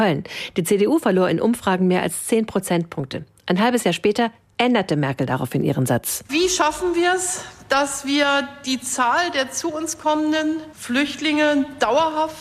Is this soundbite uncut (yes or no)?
yes